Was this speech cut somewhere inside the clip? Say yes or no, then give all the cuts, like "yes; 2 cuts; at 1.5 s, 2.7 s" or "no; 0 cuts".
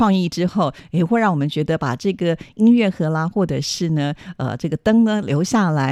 no; 0 cuts